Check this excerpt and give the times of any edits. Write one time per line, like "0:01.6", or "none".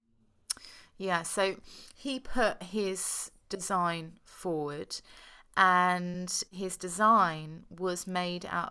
none